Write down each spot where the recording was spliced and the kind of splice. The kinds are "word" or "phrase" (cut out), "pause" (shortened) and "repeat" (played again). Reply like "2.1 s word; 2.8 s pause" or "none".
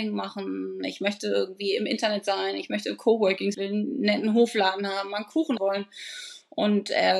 3.5 s phrase; 5.6 s word